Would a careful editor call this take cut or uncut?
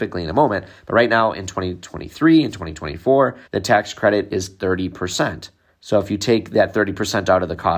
cut